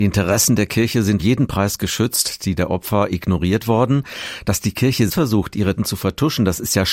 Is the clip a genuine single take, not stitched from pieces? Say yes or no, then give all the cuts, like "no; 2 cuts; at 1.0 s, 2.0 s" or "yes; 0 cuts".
no; 3 cuts; at 1.2 s, 5.1 s, 5.8 s